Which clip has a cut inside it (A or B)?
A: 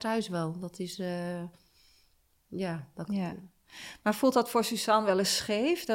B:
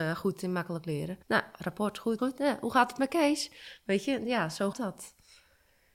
B